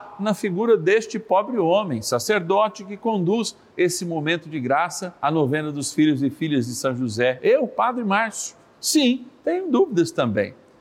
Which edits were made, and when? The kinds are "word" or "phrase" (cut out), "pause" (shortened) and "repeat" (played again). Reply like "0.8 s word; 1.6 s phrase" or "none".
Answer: 5.2 s pause